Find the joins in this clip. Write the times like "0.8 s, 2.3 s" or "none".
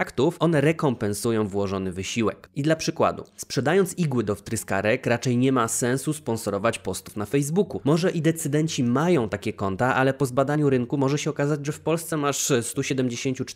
none